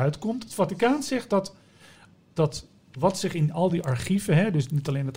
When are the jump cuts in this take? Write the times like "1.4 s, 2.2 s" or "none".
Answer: none